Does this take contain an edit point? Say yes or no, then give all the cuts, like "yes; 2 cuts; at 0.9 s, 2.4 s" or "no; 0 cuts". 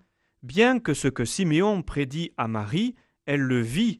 no; 0 cuts